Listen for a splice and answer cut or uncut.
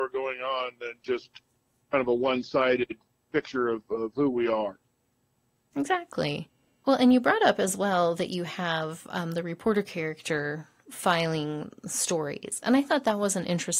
uncut